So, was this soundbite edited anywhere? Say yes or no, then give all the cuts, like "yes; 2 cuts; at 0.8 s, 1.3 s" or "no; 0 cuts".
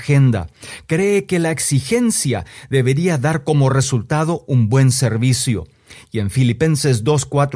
no; 0 cuts